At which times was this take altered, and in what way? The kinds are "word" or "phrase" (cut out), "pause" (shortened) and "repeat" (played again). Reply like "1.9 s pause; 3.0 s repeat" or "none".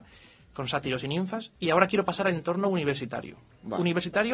1.6 s pause